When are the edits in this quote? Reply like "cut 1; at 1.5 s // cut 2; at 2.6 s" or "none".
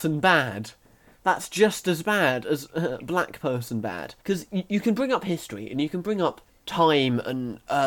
cut 1; at 4.2 s // cut 2; at 6.5 s